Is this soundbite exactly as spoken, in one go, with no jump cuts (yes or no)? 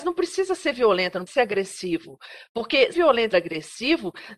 no